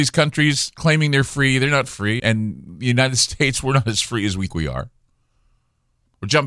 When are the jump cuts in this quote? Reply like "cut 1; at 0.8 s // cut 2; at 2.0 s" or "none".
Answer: cut 1; at 2.2 s // cut 2; at 4.5 s